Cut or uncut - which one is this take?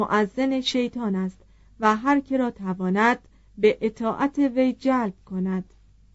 uncut